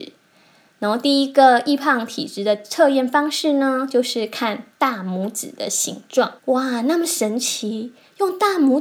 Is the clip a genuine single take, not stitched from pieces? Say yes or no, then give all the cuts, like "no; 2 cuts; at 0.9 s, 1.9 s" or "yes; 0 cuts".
no; 1 cut; at 6.4 s